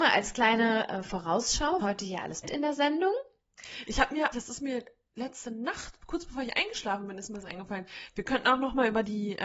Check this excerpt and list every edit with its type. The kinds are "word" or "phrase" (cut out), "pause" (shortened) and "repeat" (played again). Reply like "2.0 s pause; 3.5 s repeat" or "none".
1.8 s word; 2.4 s word; 4.3 s word